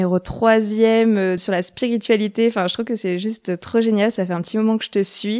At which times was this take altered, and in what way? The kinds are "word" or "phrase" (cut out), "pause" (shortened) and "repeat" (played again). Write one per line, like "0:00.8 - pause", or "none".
0:01.4 - word